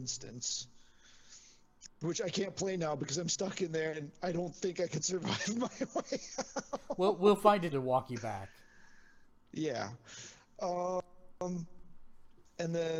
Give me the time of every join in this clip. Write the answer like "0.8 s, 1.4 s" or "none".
7.7 s